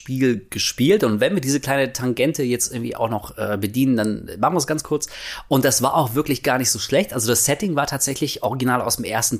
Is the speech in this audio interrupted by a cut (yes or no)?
no